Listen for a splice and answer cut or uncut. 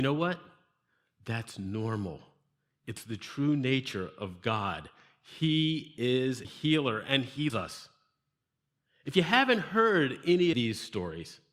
cut